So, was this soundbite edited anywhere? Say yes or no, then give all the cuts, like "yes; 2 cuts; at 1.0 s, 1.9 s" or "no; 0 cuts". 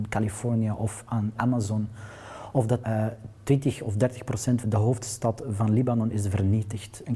yes; 4 cuts; at 1.4 s, 2.8 s, 3.4 s, 4.6 s